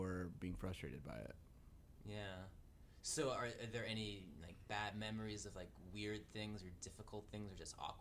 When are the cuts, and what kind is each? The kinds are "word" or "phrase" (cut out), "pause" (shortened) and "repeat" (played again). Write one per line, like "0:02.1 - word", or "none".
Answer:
none